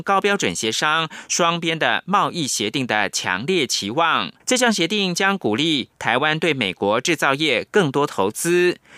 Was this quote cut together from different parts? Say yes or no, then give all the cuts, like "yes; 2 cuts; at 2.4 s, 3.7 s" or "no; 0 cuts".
yes; 1 cut; at 4.4 s